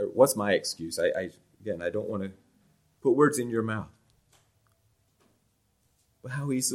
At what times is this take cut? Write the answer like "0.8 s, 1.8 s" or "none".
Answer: none